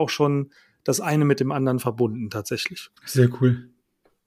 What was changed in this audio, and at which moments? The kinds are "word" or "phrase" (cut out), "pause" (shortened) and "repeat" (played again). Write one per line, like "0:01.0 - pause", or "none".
0:03.0 - pause